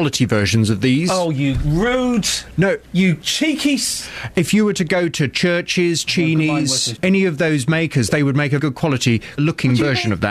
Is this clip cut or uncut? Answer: cut